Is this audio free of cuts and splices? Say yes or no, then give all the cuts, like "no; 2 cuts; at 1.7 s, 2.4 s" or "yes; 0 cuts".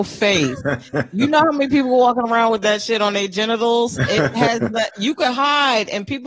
yes; 0 cuts